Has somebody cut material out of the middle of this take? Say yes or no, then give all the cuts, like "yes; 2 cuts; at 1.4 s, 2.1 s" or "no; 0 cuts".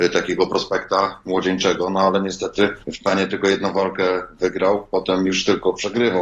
yes; 1 cut; at 2.8 s